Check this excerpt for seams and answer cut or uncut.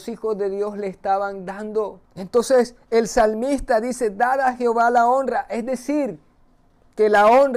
cut